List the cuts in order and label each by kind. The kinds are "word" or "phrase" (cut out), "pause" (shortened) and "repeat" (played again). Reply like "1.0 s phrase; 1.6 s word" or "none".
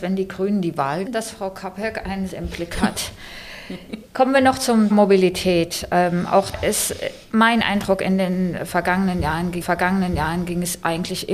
1.1 s word; 2.3 s word; 4.1 s pause; 4.9 s word; 6.5 s word; 7.2 s pause; 9.6 s repeat